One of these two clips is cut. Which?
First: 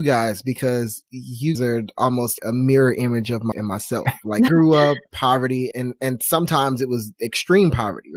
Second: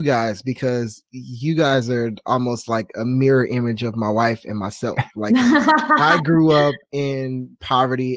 first; 6 cuts; at 1.5 s, 2.4 s, 3.5 s, 4.5 s, 5.1 s, 5.7 s

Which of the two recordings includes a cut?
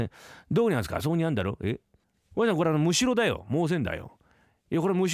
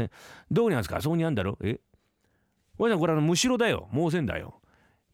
first; 1 cut; at 2.0 s

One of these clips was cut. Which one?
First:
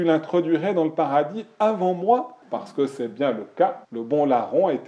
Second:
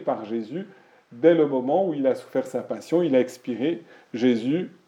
first; 2 cuts; at 2.4 s, 3.8 s

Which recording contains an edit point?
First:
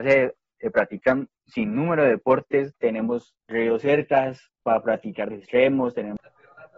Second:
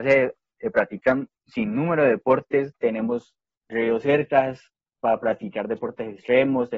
first; 3 cuts; at 3.4 s, 4.5 s, 5.3 s

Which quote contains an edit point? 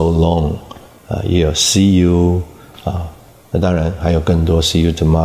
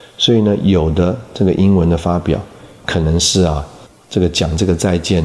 second; 2 cuts; at 2.8 s, 3.9 s

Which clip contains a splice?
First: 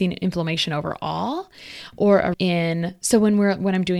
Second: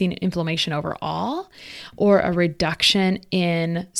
first; 1 cut; at 2.3 s

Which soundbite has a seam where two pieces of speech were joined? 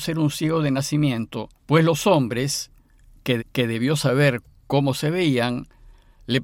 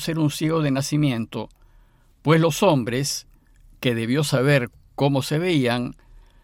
first; 2 cuts; at 1.6 s, 3.4 s

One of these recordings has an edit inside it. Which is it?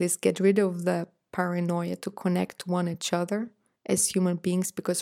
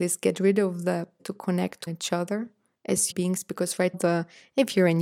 second; 4 cuts; at 1.2 s, 1.9 s, 3.1 s, 3.9 s

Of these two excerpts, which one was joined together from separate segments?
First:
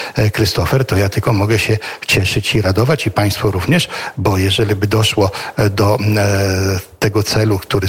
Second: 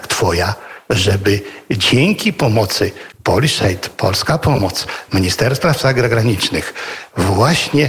second; 1 cut; at 3.1 s

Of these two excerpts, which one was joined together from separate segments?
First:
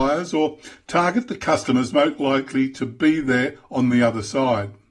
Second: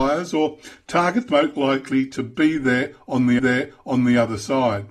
second; 2 cuts; at 1.3 s, 3.4 s

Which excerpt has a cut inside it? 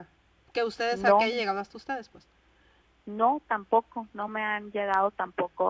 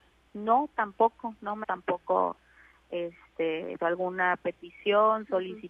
second; 2 cuts; at 1.6 s, 3.8 s

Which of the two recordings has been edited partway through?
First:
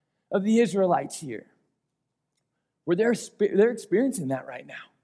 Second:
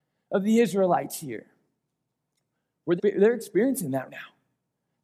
second; 2 cuts; at 3.0 s, 4.1 s

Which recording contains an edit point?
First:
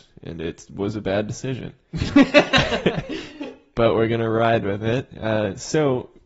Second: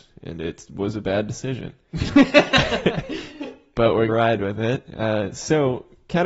second; 1 cut; at 4.1 s

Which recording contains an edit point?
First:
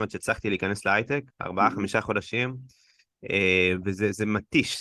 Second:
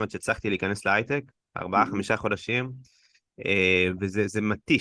first; 1 cut; at 1.3 s

